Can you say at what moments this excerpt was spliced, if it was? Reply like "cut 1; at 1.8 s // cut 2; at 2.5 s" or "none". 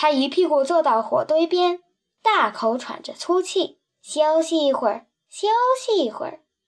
cut 1; at 3.9 s